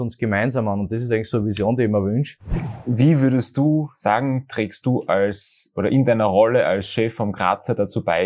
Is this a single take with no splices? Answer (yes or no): yes